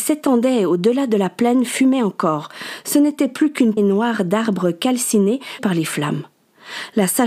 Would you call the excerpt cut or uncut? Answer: cut